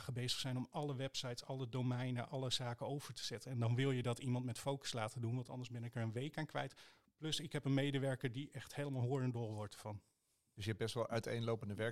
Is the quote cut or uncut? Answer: uncut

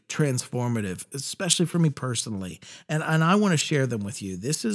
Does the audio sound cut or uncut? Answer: uncut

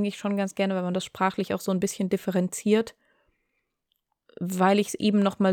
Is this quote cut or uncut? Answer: uncut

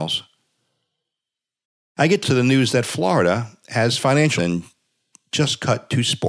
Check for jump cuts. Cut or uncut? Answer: cut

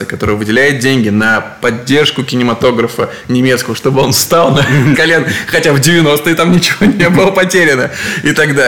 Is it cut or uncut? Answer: cut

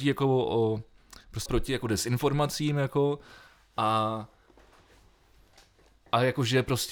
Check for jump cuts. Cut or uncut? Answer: cut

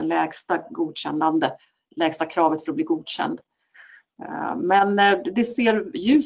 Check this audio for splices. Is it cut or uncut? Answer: uncut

